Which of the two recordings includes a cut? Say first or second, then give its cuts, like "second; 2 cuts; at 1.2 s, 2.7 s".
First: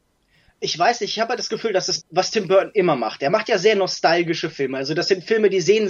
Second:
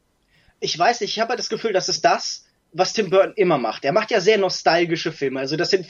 first; 1 cut; at 2.0 s